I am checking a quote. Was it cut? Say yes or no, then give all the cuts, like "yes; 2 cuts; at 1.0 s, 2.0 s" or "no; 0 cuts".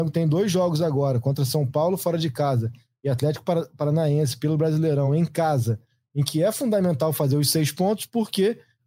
no; 0 cuts